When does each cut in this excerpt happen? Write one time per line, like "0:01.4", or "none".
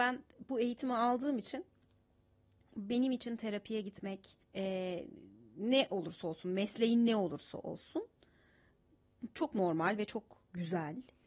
0:04.4